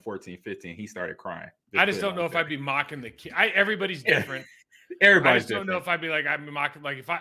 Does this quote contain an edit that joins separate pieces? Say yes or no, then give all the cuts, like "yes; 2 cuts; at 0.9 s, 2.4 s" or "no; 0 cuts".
no; 0 cuts